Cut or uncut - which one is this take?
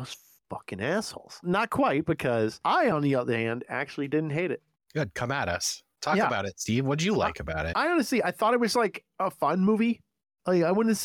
uncut